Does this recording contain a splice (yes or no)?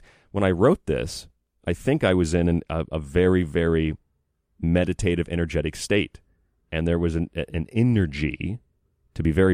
no